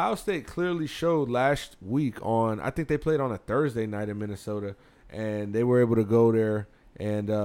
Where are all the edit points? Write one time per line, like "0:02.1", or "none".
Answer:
none